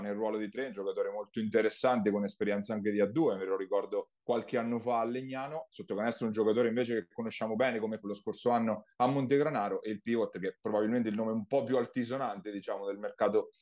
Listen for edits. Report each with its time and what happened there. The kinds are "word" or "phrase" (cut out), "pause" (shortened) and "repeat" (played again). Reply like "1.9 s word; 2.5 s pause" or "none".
4.1 s pause; 8.0 s word; 8.9 s pause